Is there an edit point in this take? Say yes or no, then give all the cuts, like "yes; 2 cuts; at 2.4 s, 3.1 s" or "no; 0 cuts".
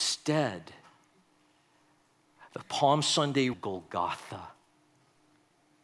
yes; 1 cut; at 3.5 s